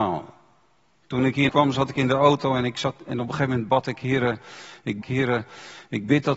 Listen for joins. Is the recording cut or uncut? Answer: cut